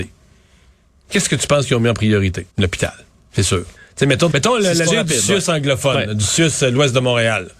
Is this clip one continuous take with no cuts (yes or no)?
no